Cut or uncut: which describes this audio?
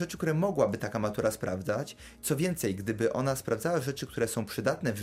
uncut